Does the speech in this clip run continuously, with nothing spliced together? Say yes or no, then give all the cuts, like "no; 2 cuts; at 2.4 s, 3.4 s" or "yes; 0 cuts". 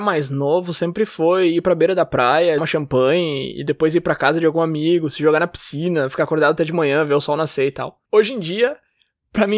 no; 2 cuts; at 2.6 s, 8.1 s